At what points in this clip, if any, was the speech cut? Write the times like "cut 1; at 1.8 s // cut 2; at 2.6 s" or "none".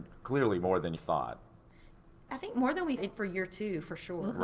cut 1; at 0.9 s // cut 2; at 2.3 s // cut 3; at 3.0 s